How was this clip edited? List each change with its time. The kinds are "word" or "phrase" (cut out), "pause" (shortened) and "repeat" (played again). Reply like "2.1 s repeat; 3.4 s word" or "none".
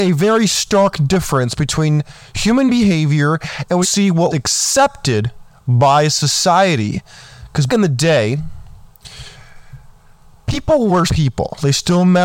3.8 s word; 4.3 s word; 7.7 s word; 11.1 s word